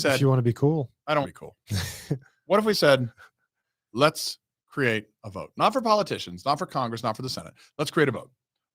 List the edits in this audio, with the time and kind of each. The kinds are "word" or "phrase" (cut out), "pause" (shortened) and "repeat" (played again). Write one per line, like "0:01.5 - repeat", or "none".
0:01.2 - word

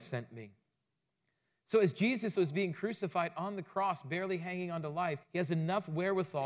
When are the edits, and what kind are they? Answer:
0:02.4 - word
0:05.2 - pause

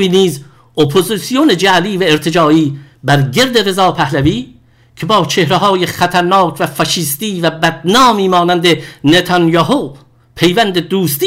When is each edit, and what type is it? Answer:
none

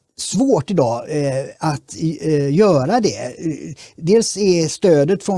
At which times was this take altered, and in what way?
none

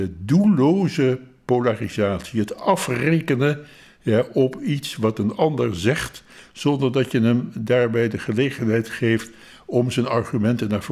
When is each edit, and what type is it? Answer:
none

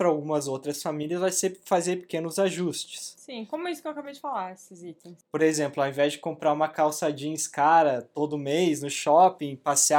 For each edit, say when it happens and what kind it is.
none

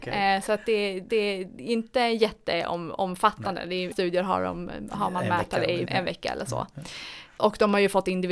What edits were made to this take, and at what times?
0:01.1 - repeat
0:03.9 - word
0:05.9 - word

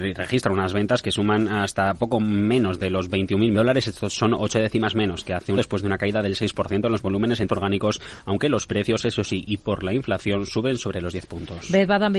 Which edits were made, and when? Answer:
0:03.5 - phrase
0:05.6 - word
0:07.5 - word

